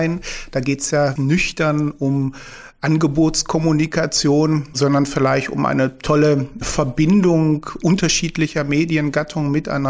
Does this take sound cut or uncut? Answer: cut